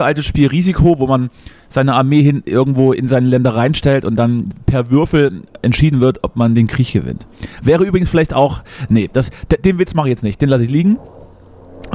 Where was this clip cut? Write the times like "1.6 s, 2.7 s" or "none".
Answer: none